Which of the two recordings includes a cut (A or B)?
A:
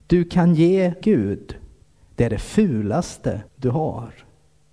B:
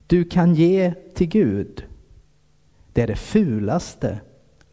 A